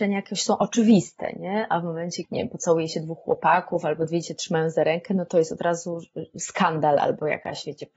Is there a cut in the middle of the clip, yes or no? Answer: yes